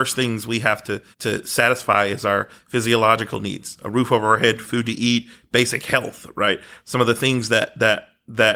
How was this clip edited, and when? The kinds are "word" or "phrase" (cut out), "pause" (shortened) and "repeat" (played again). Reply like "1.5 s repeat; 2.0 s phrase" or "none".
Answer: 1.1 s pause